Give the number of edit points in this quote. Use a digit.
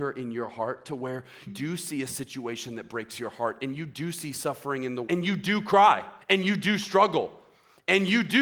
3